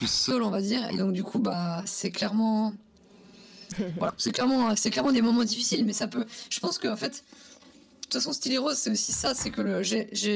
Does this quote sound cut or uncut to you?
uncut